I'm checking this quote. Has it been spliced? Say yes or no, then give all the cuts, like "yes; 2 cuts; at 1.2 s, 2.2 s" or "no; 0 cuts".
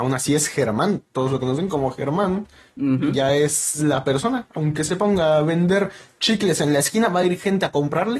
no; 0 cuts